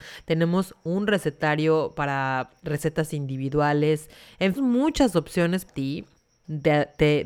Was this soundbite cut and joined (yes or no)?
yes